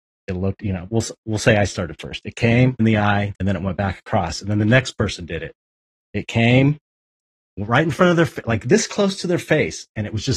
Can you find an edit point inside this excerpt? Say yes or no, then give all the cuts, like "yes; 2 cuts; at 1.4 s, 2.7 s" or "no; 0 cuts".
yes; 2 cuts; at 2.8 s, 3.3 s